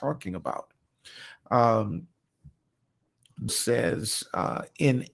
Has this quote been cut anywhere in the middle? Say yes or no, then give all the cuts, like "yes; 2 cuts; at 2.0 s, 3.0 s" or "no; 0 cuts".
yes; 1 cut; at 3.5 s